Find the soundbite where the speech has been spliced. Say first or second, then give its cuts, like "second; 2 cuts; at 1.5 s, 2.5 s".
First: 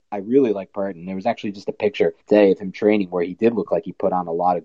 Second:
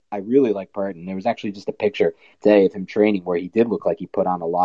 first; 1 cut; at 2.2 s